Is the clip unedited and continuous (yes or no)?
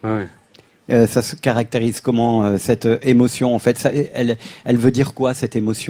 yes